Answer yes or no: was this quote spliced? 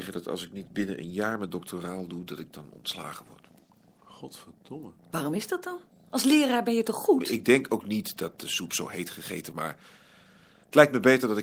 yes